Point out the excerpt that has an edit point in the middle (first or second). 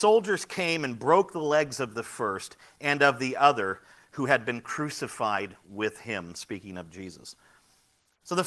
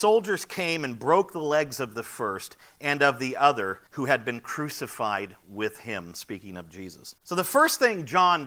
second